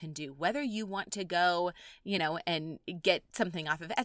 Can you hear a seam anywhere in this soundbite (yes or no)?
no